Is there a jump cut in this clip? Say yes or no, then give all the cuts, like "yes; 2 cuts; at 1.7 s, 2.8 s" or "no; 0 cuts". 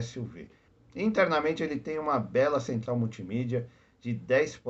no; 0 cuts